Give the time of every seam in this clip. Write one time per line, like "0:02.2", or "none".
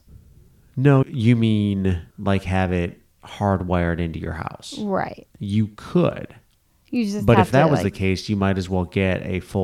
0:01.0
0:02.1